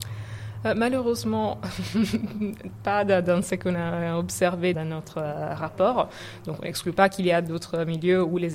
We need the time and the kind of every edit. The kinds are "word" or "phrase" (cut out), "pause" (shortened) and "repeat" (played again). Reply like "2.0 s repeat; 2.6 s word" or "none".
4.7 s word